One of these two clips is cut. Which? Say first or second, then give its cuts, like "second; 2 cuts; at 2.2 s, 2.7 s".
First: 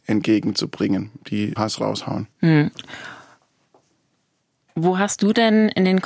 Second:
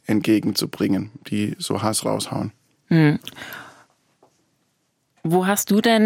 first; 2 cuts; at 1.6 s, 2.3 s